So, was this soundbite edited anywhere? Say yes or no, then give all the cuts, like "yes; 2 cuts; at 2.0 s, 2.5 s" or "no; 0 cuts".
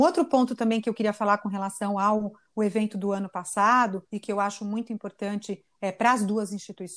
yes; 1 cut; at 4.1 s